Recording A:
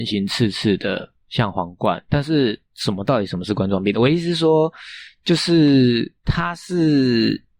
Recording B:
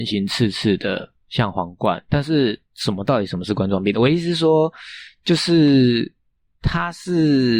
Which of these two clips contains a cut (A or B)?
A